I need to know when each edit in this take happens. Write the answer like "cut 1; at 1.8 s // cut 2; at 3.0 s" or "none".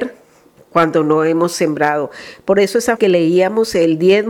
cut 1; at 3.0 s